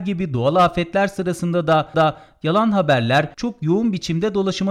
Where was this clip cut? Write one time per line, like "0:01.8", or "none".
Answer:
0:01.9
0:03.3